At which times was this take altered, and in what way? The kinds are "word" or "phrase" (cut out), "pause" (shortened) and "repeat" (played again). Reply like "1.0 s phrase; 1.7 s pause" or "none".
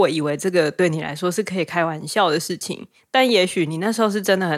none